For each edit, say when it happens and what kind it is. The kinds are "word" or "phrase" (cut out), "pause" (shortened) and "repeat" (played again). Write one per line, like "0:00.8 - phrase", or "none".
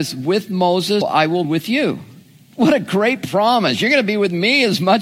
0:01.0 - word
0:01.4 - word